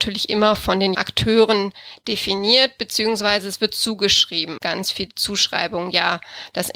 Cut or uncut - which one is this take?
cut